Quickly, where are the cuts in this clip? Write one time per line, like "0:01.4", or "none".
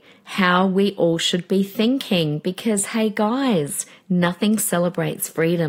none